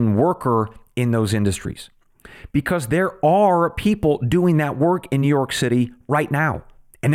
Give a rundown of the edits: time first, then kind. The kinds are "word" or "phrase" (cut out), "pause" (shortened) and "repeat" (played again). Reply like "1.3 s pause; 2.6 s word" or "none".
none